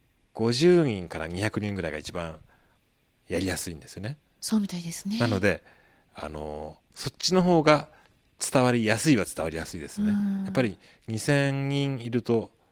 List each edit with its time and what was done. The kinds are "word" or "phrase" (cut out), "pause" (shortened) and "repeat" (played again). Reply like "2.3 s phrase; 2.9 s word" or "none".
none